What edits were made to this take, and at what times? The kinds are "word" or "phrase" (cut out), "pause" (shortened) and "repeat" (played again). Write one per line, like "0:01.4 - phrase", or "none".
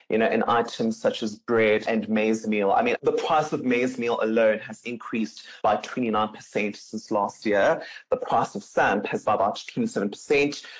0:02.9 - word
0:09.2 - word